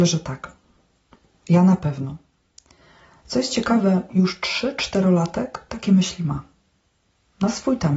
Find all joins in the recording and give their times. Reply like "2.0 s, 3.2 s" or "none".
none